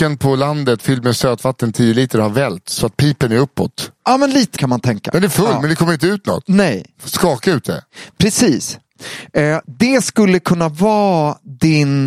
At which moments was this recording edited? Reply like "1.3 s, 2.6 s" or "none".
4.5 s, 9.6 s